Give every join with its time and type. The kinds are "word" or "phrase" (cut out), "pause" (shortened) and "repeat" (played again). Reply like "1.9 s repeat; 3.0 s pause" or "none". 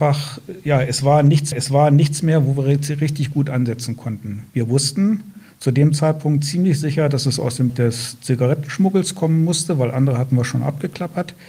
1.5 s repeat; 4.5 s pause; 7.7 s word; 9.9 s word